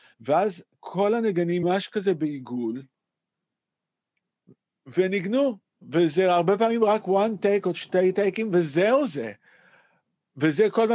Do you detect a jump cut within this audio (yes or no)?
yes